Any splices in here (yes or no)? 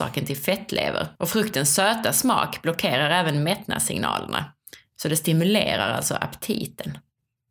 yes